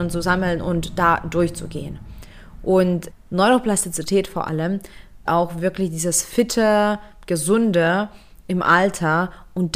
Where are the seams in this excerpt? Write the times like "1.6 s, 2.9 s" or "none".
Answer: 3.1 s, 5.3 s